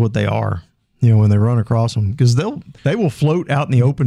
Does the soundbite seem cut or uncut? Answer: cut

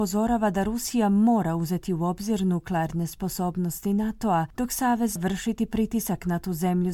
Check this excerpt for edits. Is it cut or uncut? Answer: cut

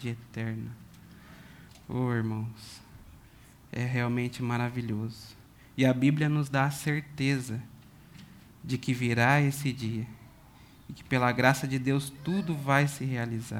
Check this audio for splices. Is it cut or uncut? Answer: uncut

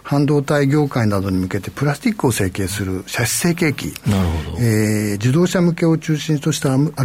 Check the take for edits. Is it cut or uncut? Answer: uncut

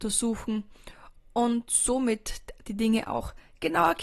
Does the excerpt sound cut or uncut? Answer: uncut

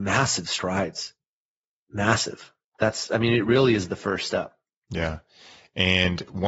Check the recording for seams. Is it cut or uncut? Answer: uncut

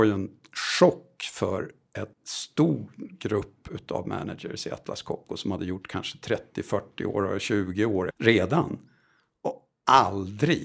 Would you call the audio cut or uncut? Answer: cut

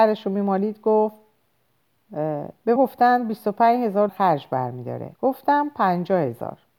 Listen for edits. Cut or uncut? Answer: cut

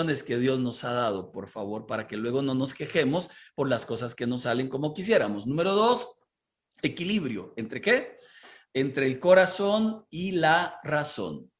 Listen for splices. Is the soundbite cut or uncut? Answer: uncut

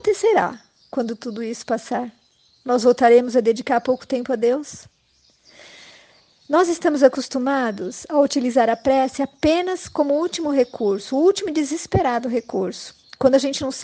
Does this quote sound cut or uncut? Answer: uncut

